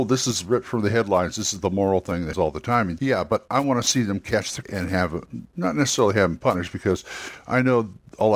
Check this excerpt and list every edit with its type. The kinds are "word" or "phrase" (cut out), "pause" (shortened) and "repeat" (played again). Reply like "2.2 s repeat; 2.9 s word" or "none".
2.3 s word; 3.0 s word; 4.6 s word